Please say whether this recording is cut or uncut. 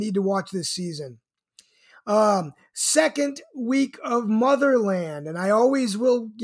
uncut